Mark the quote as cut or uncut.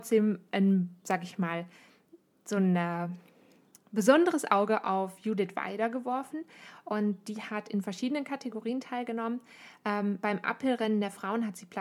uncut